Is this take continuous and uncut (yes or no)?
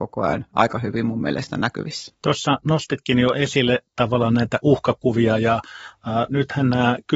no